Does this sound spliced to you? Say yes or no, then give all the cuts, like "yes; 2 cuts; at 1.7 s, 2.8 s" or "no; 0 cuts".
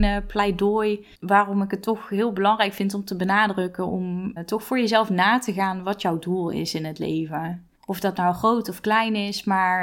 yes; 3 cuts; at 1.1 s, 4.4 s, 7.7 s